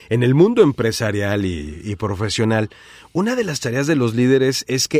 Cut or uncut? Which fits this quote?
uncut